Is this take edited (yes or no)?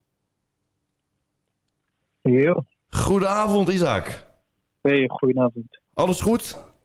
yes